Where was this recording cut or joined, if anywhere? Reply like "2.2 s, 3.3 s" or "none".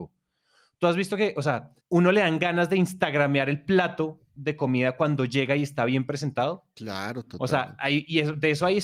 1.8 s